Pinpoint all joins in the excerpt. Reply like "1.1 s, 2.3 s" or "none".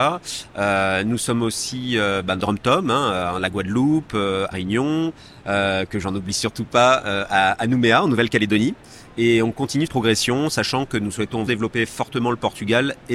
2.4 s, 4.5 s, 9.9 s, 11.5 s